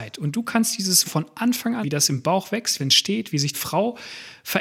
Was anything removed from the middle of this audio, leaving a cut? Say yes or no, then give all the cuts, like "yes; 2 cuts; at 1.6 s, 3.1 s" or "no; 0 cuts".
yes; 4 cuts; at 1.0 s, 1.8 s, 2.8 s, 3.5 s